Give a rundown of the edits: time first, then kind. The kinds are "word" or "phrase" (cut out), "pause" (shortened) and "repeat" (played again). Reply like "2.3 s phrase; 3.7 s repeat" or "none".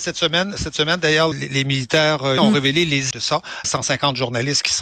1.3 s phrase; 2.4 s word; 3.1 s word; 3.6 s phrase